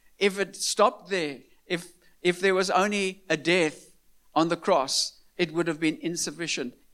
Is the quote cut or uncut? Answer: uncut